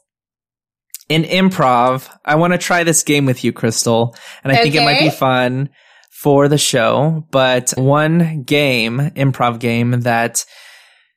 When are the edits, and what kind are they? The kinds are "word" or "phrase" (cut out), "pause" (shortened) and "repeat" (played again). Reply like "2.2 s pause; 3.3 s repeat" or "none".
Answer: 7.8 s word